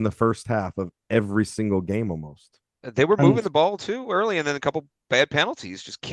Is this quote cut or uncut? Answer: uncut